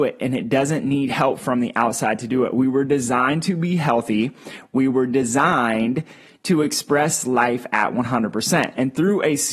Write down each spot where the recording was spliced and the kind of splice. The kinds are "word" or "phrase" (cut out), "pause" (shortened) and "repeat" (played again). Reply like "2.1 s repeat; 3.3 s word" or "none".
none